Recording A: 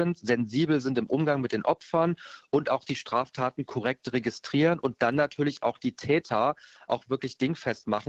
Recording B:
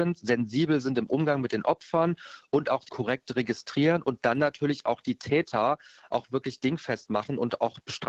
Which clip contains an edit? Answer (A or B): B